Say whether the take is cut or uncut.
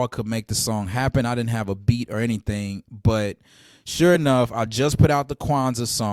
uncut